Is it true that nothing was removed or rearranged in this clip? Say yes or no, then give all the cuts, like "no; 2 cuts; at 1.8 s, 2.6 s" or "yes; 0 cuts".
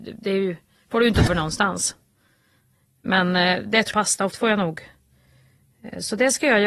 no; 3 cuts; at 1.3 s, 3.9 s, 4.3 s